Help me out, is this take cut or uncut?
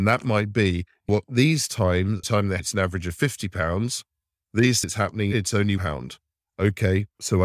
cut